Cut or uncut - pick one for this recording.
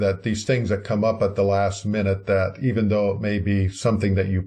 uncut